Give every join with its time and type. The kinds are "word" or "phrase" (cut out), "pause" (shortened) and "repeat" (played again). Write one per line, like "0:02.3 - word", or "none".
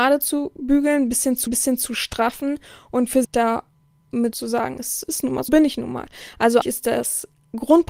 0:01.5 - repeat
0:03.2 - word
0:04.3 - phrase
0:05.5 - word
0:06.6 - word